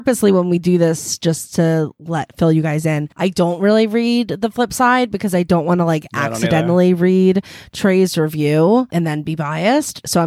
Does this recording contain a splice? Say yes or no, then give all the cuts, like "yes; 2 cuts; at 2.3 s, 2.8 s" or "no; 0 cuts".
yes; 1 cut; at 3.1 s